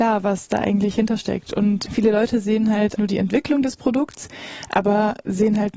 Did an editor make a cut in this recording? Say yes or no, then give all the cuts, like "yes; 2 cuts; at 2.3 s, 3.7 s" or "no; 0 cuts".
yes; 2 cuts; at 1.9 s, 3.0 s